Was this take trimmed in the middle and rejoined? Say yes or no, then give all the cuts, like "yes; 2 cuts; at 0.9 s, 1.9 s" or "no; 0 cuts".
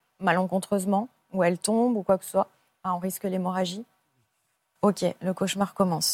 no; 0 cuts